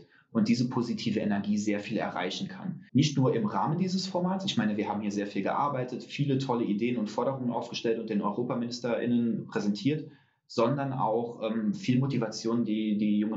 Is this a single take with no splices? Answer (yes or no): no